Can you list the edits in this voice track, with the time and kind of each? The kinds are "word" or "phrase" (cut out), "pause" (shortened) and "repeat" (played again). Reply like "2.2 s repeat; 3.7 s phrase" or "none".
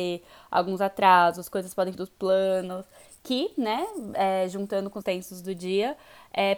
1.9 s word; 5.0 s word